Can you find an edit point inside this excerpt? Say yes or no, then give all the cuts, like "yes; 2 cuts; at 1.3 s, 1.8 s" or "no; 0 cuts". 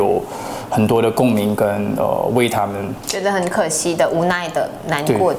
no; 0 cuts